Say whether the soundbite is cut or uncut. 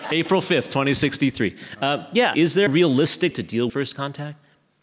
cut